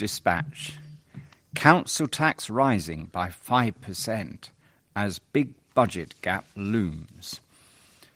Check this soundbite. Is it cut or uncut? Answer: uncut